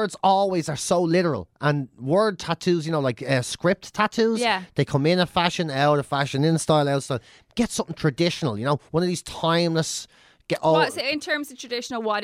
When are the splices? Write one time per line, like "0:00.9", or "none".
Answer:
none